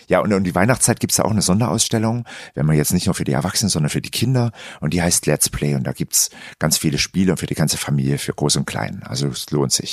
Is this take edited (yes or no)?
no